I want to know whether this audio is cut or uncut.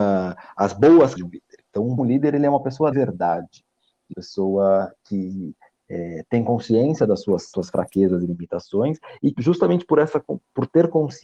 cut